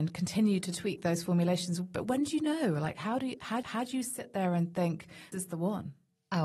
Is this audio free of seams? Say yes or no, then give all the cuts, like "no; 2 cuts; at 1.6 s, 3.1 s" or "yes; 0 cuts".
no; 2 cuts; at 3.6 s, 5.3 s